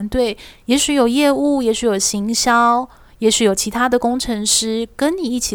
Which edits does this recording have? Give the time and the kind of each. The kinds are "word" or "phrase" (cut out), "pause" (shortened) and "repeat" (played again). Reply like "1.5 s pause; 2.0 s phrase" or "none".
none